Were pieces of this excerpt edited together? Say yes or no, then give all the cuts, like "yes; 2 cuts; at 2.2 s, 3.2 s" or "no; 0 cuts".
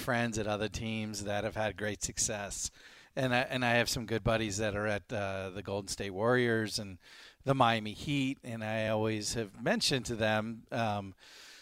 no; 0 cuts